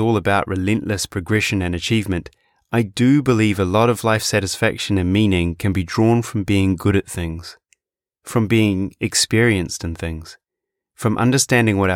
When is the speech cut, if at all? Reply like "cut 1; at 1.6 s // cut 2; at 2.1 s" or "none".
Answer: none